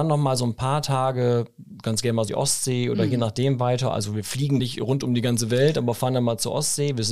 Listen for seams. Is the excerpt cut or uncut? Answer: cut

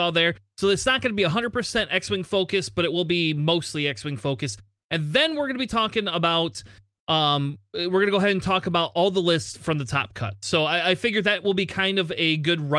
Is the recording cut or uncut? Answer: uncut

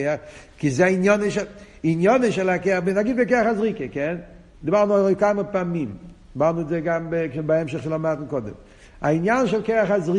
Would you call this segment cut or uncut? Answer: cut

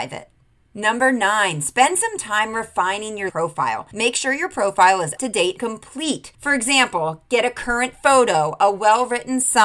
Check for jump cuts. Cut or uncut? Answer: cut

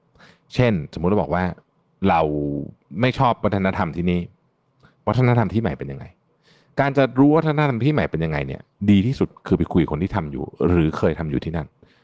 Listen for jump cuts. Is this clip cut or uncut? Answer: uncut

